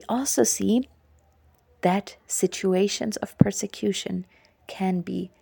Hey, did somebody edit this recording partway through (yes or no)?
no